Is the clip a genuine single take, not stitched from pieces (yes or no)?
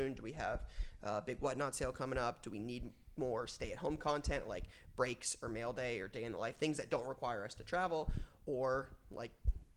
yes